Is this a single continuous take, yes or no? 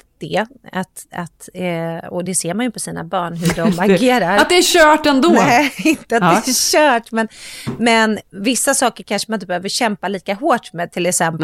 yes